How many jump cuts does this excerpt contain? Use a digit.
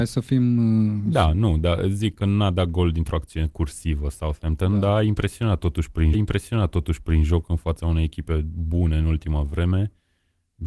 1